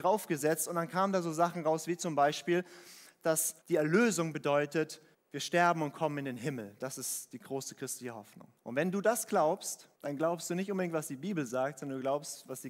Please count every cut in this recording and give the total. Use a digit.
4